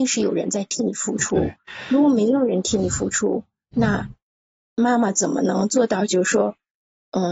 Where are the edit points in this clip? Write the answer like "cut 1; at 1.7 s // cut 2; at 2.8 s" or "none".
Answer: none